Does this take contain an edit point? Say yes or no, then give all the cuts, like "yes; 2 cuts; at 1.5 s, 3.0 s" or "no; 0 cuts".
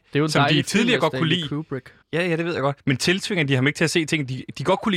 yes; 2 cuts; at 2.0 s, 2.8 s